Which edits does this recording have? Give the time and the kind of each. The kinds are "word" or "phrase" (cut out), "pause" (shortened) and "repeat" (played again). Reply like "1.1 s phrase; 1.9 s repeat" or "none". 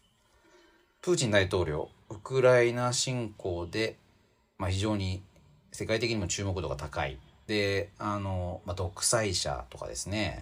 none